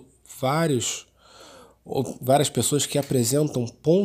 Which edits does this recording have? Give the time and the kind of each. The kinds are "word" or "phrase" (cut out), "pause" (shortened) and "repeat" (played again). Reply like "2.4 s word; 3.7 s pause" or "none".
none